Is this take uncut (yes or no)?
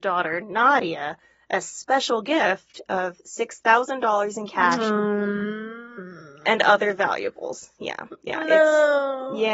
yes